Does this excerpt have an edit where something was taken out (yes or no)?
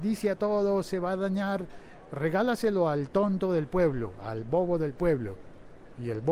no